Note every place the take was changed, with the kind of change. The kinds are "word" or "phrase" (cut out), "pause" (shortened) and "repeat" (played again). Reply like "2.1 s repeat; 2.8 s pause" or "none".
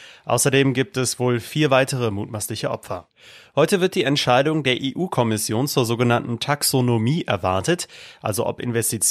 none